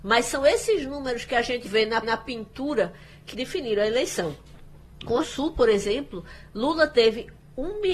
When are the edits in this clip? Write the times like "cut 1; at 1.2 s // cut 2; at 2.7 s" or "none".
cut 1; at 1.6 s // cut 2; at 2.0 s // cut 3; at 3.3 s // cut 4; at 5.2 s